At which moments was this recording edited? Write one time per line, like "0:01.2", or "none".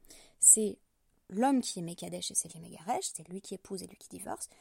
0:02.5